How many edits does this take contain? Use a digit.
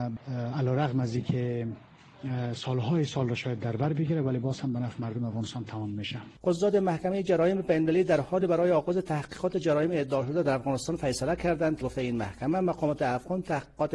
1